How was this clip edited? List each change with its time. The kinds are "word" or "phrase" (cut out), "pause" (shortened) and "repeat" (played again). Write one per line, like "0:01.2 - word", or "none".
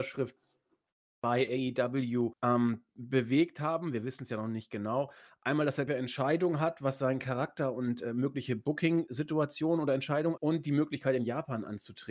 0:02.3 - word
0:05.9 - word
0:10.4 - word